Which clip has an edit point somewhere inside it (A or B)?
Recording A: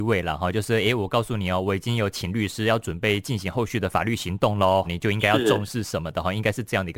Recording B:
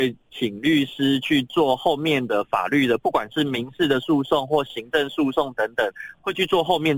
A